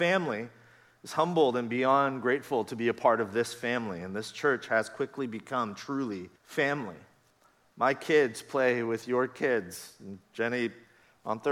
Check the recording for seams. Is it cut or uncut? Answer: cut